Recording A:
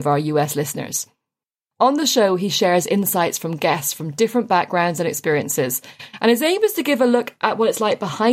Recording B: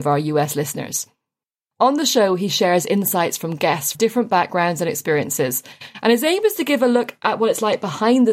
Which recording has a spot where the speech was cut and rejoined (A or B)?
B